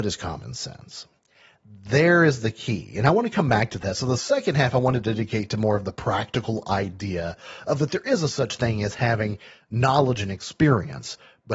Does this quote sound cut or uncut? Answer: uncut